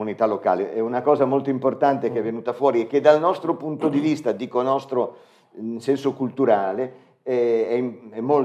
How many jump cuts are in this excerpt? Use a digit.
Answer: 0